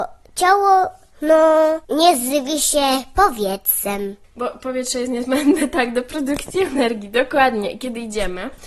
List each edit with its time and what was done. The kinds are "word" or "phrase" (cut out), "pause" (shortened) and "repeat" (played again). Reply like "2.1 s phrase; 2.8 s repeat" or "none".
1.8 s pause; 4.2 s pause

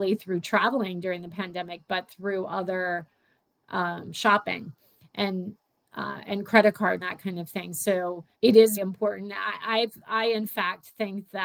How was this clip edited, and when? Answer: 7.0 s word; 8.3 s pause; 8.8 s word

